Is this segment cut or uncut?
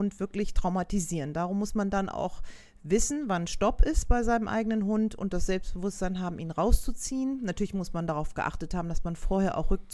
uncut